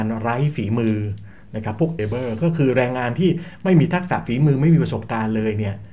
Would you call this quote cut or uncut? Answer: cut